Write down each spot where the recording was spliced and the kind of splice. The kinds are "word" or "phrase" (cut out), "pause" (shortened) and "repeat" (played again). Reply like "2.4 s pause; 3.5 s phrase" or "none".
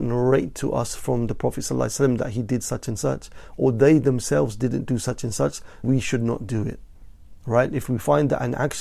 5.8 s word